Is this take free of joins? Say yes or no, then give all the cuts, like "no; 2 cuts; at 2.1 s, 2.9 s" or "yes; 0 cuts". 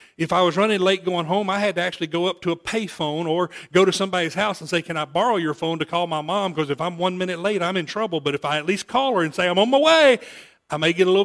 yes; 0 cuts